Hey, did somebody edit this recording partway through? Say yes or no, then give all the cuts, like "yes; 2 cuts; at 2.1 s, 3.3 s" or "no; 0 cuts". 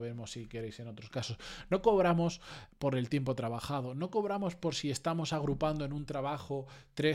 no; 0 cuts